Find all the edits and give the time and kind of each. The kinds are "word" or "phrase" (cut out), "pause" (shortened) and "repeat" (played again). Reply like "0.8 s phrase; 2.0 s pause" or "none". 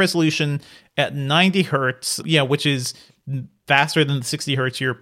2.2 s word

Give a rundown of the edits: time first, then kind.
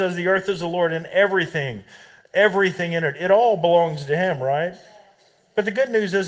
none

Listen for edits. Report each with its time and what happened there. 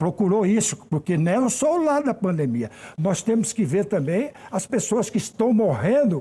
none

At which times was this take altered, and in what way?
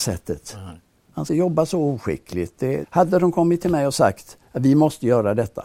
1.3 s phrase; 2.8 s word; 4.4 s pause

